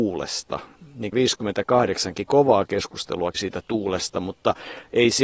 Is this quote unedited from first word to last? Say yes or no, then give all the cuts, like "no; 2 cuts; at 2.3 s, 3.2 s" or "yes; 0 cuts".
no; 2 cuts; at 1.1 s, 3.3 s